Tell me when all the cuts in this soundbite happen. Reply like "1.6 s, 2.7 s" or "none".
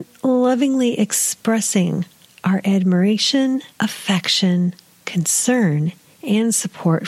3.7 s